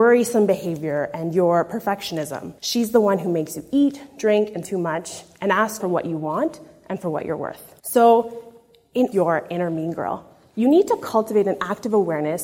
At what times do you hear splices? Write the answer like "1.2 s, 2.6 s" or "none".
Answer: 2.6 s, 4.6 s, 5.8 s, 7.8 s, 9.1 s